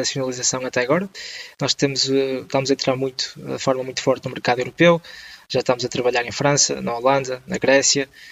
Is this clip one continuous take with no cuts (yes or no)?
yes